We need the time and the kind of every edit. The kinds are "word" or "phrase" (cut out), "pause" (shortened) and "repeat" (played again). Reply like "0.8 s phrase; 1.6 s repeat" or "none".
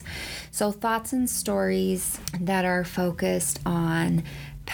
none